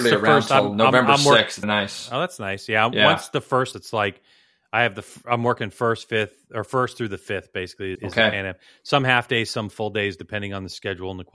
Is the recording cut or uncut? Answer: cut